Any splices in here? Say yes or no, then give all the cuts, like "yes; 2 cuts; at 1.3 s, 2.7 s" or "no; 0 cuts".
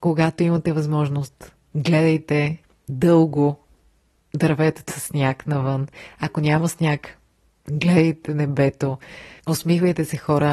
yes; 3 cuts; at 1.7 s, 2.6 s, 4.9 s